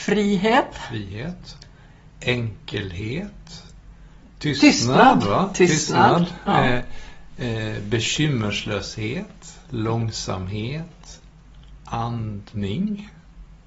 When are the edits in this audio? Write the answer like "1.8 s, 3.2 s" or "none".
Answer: 9.6 s